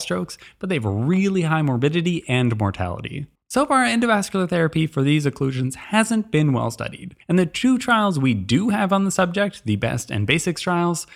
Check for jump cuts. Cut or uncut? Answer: cut